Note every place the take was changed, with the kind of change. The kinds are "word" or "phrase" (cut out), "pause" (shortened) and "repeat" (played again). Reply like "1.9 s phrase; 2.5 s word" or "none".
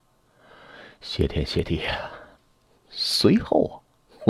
none